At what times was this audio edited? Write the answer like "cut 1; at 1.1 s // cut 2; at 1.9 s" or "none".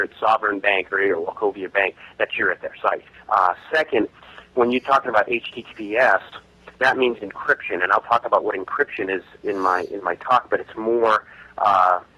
cut 1; at 3.1 s // cut 2; at 6.8 s